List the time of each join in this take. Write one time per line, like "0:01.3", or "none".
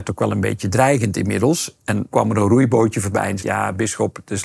0:02.1
0:03.4

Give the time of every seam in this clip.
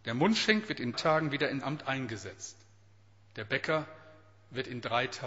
0:00.9
0:01.6

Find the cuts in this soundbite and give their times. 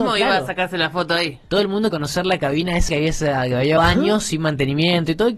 0:01.9
0:02.9
0:03.8

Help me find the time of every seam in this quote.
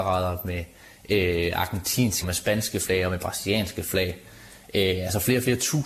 0:02.2

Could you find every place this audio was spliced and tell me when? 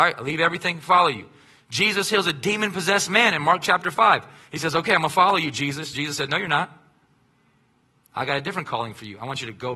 none

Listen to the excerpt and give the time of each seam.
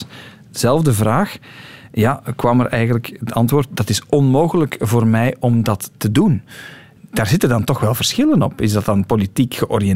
none

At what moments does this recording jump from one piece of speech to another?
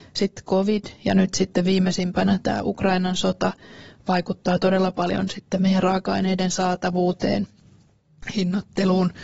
0:02.4

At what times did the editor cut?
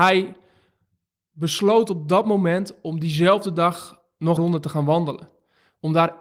0:04.4

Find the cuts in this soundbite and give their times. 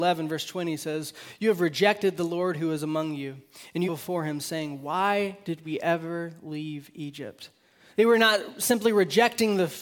0:03.8

